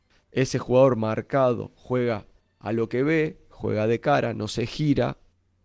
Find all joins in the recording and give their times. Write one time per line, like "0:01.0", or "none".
none